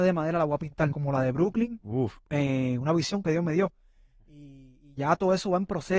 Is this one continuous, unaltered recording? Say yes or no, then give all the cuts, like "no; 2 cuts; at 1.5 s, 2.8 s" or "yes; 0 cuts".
no; 2 cuts; at 0.9 s, 2.2 s